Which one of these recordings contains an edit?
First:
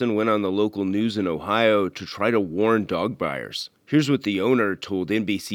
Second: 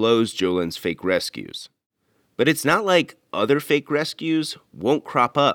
first; 1 cut; at 3.8 s

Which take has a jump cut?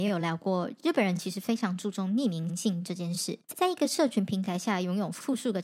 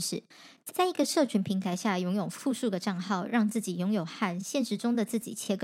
first; 1 cut; at 3.4 s

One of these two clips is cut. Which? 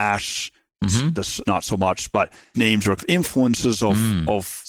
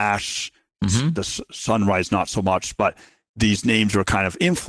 first; 3 cuts; at 1.4 s, 2.5 s, 3.0 s

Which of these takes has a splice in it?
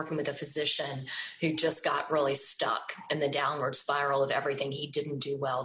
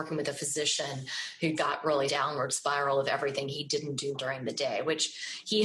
second; 3 cuts; at 1.6 s, 2.1 s, 4.1 s

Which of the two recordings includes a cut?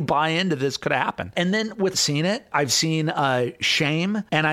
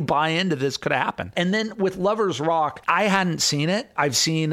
first; 1 cut; at 1.9 s

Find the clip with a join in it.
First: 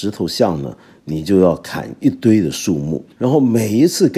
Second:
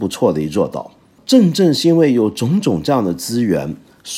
first; 1 cut; at 3.1 s

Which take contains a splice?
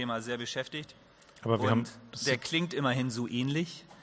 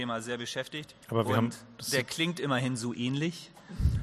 second; 1 cut; at 1.0 s

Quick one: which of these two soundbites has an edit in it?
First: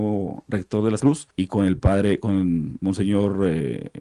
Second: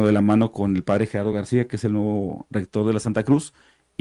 first; 2 cuts; at 1.0 s, 1.3 s

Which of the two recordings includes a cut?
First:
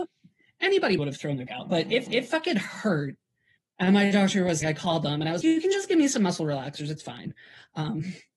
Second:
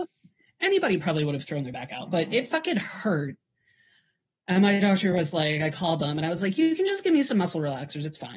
first; 6 cuts; at 1.0 s, 1.5 s, 2.1 s, 3.6 s, 4.6 s, 5.4 s

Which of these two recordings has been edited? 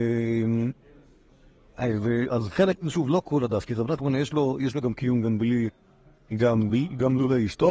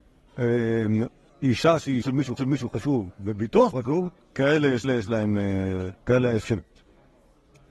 second; 8 cuts; at 1.3 s, 2.0 s, 2.4 s, 3.7 s, 4.2 s, 4.8 s, 6.0 s, 6.4 s

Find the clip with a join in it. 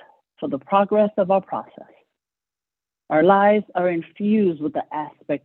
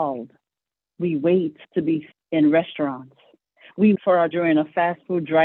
second; 4 cuts; at 1.6 s, 2.1 s, 4.0 s, 4.3 s

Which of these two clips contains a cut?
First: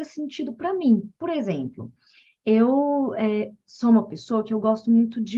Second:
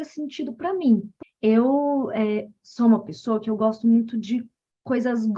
second; 1 cut; at 1.2 s

